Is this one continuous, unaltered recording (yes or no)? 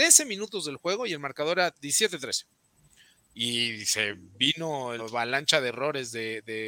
no